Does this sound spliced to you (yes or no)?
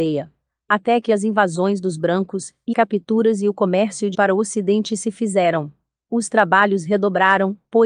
yes